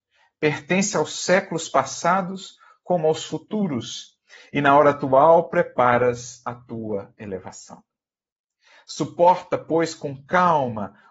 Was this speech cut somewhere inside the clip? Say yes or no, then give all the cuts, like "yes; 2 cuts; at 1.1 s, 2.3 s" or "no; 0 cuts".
no; 0 cuts